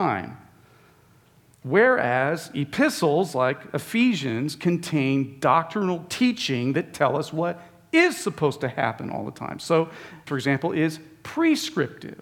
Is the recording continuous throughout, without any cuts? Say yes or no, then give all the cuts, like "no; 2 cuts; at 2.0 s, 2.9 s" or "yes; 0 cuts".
no; 1 cut; at 10.3 s